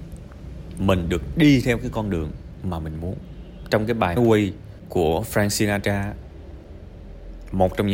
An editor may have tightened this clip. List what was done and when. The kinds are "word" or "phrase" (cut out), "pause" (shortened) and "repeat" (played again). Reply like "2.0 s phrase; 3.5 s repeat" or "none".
4.2 s word

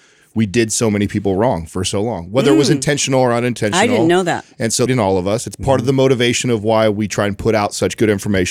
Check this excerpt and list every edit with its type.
4.9 s phrase

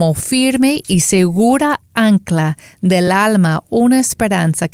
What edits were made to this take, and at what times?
none

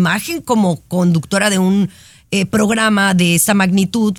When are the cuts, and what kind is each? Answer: none

